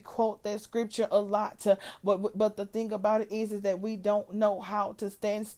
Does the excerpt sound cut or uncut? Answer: uncut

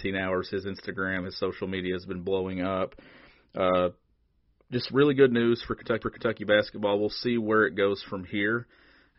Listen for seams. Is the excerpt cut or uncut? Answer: cut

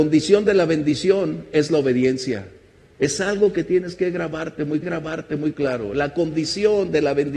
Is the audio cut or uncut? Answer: cut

